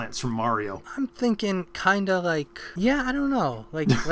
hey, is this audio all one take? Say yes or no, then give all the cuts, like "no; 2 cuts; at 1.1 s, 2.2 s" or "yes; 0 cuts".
yes; 0 cuts